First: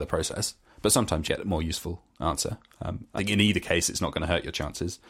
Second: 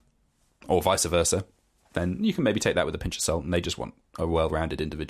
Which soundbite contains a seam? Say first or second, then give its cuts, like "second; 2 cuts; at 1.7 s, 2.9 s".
first; 2 cuts; at 1.3 s, 3.2 s